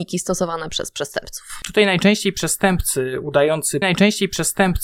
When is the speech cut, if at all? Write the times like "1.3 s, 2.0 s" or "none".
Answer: 3.8 s